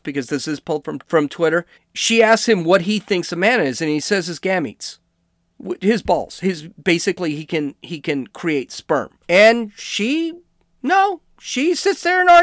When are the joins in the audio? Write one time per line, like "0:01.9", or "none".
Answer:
0:01.0
0:01.7
0:09.2